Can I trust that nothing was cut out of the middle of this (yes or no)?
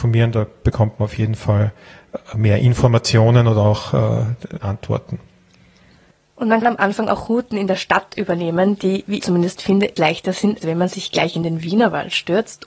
no